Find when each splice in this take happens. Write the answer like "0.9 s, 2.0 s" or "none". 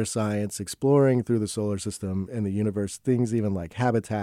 none